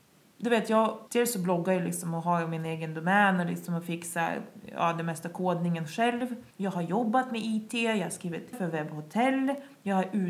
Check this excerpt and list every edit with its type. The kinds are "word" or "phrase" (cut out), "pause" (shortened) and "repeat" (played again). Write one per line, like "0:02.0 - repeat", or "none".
0:01.1 - pause
0:06.5 - pause
0:08.5 - word